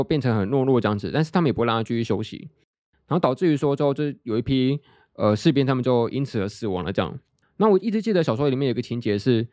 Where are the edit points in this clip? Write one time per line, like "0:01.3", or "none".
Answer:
0:07.3